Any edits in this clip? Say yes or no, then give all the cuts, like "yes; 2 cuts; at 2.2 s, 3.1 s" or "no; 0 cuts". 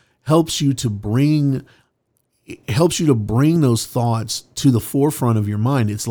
no; 0 cuts